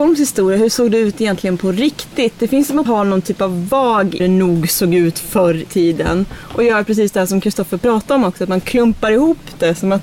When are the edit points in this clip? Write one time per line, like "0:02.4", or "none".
0:02.9
0:04.2
0:05.7